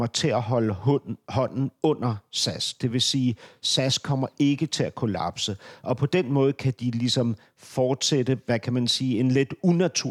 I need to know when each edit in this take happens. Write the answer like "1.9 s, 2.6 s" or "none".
none